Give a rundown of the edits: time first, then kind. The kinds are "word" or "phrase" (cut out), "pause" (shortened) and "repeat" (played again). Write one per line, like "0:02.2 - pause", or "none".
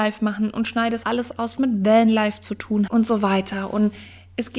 0:01.0 - word
0:01.6 - word
0:02.9 - word